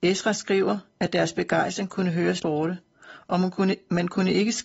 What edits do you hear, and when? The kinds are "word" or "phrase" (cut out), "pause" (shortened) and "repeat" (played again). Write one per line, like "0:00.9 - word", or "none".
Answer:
0:02.4 - word